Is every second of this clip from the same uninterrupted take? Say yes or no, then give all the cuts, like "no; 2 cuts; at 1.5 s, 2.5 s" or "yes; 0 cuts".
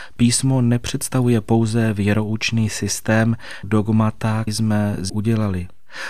no; 3 cuts; at 3.6 s, 4.5 s, 5.1 s